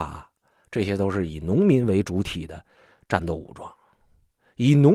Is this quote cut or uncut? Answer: uncut